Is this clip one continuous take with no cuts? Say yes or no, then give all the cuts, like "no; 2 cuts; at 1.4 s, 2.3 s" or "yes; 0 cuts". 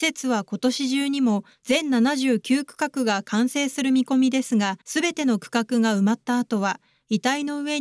no; 1 cut; at 4.8 s